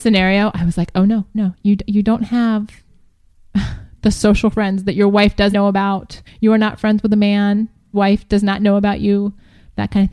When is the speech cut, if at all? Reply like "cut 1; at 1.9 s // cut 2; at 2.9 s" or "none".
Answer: cut 1; at 1.3 s // cut 2; at 5.5 s // cut 3; at 6.3 s // cut 4; at 7.9 s